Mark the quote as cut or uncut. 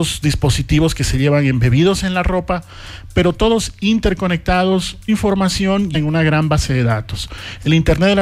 cut